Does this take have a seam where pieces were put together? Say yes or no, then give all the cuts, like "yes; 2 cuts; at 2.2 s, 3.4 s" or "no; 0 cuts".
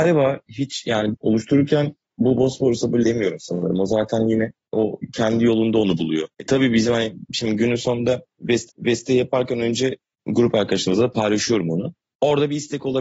yes; 4 cuts; at 1.1 s, 3.0 s, 6.3 s, 8.7 s